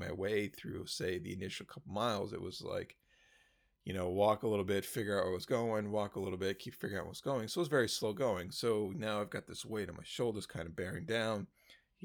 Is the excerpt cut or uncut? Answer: uncut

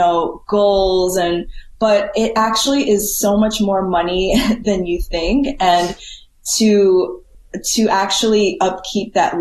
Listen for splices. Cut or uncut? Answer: uncut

